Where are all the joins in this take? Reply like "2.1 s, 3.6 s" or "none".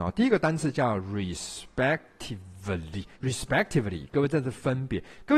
3.1 s